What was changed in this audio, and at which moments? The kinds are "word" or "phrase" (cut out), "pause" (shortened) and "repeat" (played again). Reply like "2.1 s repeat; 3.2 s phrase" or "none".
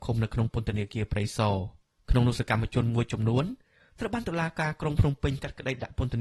none